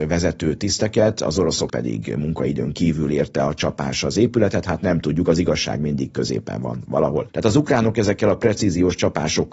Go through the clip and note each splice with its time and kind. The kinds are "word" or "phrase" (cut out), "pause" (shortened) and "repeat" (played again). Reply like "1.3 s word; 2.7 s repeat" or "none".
1.7 s word